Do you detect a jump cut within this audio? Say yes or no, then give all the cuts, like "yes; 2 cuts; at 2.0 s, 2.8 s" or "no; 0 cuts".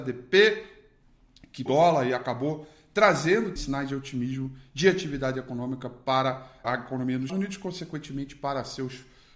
yes; 4 cuts; at 1.7 s, 3.6 s, 6.6 s, 7.3 s